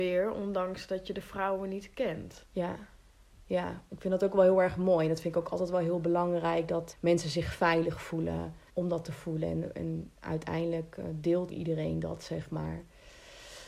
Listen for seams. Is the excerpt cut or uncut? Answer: cut